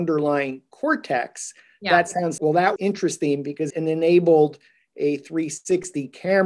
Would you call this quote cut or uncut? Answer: cut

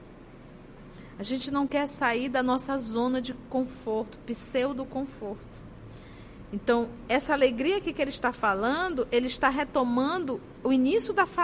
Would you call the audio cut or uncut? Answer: uncut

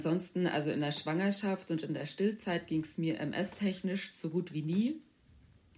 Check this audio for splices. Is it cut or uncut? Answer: uncut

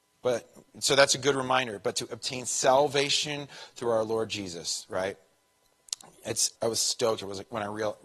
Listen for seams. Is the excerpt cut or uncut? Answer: cut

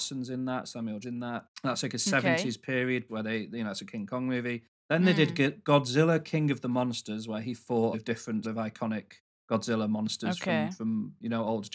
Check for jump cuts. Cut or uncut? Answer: cut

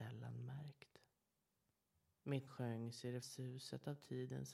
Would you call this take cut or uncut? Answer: cut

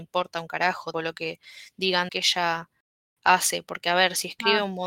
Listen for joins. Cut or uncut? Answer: cut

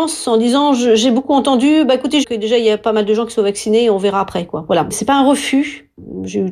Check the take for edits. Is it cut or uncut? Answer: cut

